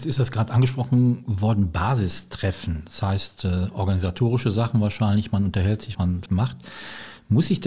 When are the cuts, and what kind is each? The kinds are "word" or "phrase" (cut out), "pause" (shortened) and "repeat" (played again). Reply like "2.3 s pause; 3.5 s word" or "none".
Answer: 5.9 s word; 6.3 s word